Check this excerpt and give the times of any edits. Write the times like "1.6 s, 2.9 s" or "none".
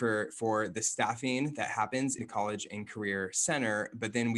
2.2 s